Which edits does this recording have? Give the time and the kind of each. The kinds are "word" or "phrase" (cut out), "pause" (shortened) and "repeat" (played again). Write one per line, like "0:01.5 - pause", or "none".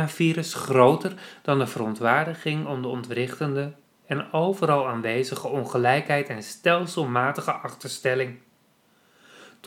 none